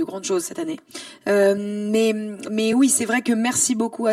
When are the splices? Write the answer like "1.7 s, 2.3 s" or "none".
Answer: none